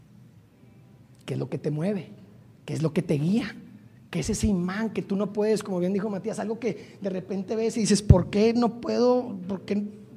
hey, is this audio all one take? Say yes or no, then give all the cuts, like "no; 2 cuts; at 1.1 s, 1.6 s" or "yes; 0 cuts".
yes; 0 cuts